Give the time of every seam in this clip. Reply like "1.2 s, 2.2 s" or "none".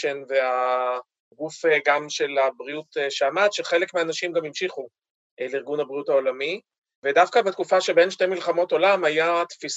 none